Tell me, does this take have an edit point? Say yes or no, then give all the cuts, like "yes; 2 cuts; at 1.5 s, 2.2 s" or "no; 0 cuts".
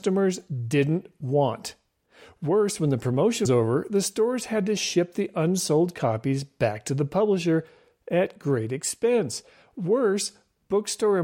yes; 1 cut; at 3.5 s